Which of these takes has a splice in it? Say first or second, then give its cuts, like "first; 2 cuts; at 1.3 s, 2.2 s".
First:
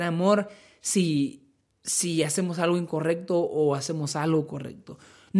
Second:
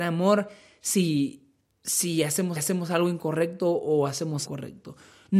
second; 2 cuts; at 2.6 s, 4.4 s